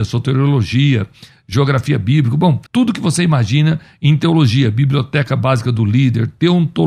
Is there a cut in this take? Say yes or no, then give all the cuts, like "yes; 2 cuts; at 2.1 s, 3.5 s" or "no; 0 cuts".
yes; 1 cut; at 2.7 s